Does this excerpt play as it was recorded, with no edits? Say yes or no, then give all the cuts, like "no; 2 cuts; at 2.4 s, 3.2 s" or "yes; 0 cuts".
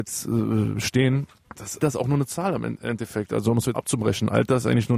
no; 2 cuts; at 1.8 s, 3.7 s